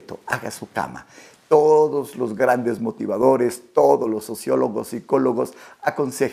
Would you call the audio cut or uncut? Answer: uncut